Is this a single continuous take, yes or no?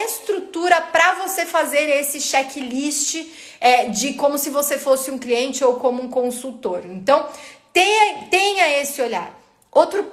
yes